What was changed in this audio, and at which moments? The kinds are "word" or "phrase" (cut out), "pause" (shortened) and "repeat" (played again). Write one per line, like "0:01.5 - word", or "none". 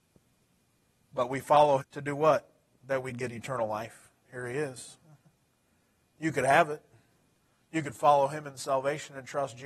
0:01.8 - word
0:04.2 - pause